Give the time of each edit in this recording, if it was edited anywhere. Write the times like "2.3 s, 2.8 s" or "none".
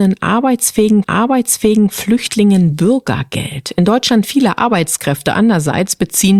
1.0 s, 4.2 s